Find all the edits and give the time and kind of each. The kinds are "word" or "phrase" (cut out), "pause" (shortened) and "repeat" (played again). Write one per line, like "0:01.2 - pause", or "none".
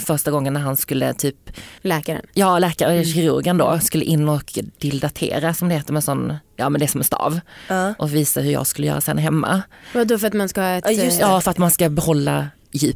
0:01.8 - pause
0:06.4 - pause

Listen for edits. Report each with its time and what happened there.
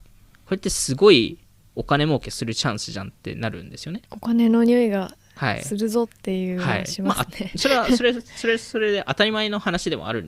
0:04.0 - pause

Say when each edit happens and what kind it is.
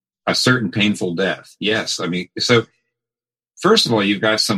none

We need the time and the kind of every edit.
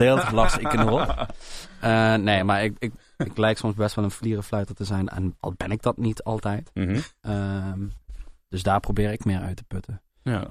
none

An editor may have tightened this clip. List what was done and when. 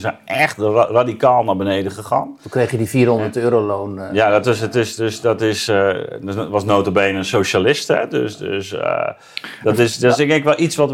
none

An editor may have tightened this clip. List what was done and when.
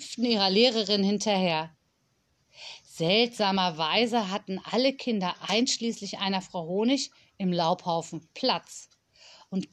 none

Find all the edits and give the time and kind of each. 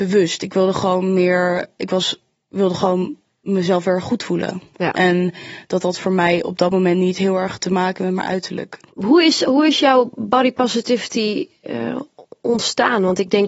none

